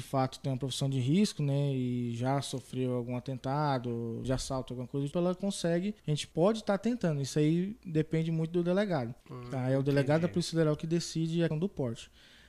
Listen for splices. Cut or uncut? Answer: cut